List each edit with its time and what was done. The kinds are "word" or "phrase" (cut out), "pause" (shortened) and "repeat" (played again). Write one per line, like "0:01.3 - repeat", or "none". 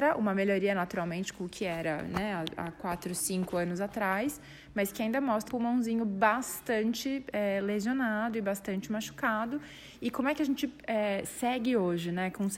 0:05.5 - word